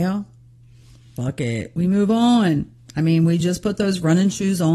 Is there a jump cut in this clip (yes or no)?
no